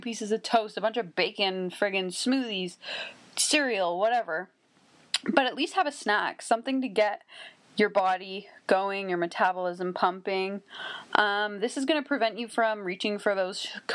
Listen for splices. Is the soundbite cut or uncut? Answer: uncut